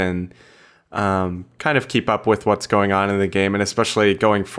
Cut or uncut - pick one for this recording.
uncut